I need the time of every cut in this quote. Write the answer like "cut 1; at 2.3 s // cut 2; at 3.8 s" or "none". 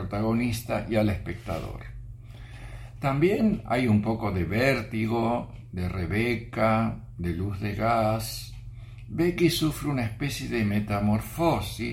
none